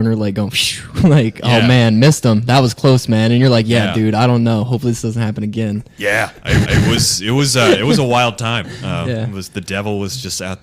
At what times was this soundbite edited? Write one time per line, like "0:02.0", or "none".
0:06.6